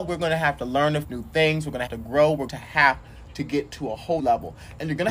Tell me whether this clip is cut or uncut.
cut